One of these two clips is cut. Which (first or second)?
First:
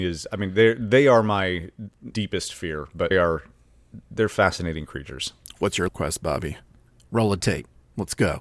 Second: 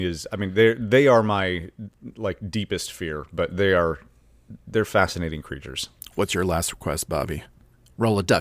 first